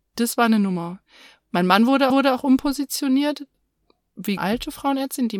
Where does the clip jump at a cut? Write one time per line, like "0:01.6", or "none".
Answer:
0:02.1
0:04.4